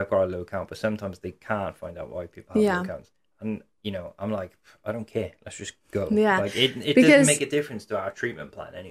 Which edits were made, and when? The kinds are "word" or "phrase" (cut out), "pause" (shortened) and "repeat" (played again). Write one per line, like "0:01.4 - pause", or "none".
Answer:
none